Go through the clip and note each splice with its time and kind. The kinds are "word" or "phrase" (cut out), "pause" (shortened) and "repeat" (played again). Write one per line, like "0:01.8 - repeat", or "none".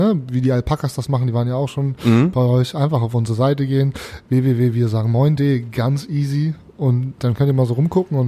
none